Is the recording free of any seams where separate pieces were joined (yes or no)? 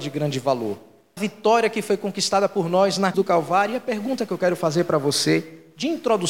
no